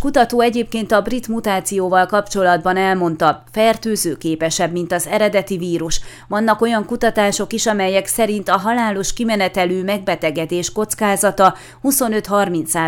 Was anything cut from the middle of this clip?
no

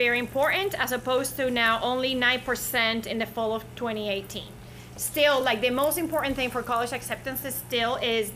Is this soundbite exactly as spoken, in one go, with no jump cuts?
yes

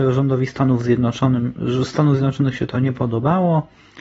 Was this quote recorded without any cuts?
yes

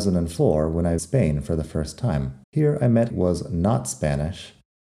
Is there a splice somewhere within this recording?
yes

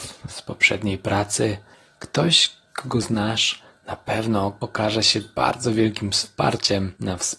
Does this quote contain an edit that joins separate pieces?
no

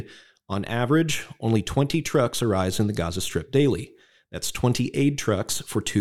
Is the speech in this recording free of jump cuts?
yes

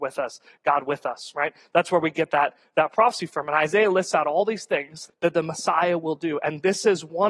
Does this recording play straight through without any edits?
no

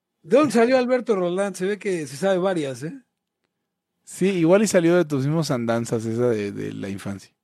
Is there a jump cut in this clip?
no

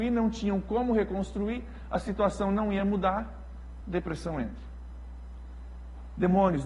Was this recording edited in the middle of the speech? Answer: no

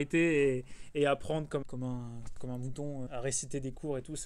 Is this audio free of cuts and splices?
no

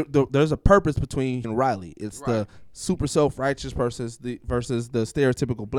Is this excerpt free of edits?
no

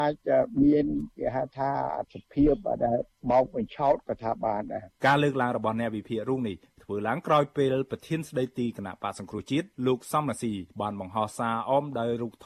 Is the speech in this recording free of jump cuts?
no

